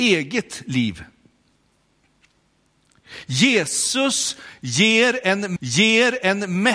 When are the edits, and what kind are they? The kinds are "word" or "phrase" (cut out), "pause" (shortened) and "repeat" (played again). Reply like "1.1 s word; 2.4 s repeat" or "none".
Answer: 5.6 s repeat